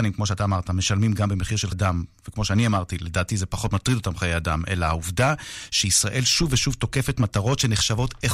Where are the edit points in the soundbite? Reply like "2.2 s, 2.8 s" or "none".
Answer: 1.7 s